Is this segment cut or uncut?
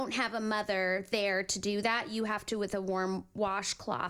uncut